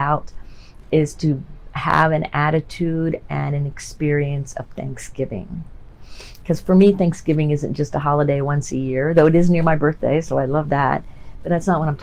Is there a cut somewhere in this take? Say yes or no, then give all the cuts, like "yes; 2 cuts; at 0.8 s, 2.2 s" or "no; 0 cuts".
no; 0 cuts